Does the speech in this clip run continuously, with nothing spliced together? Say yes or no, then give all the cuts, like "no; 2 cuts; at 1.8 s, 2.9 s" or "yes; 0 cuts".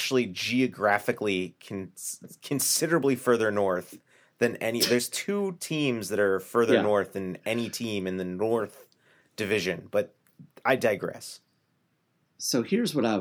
yes; 0 cuts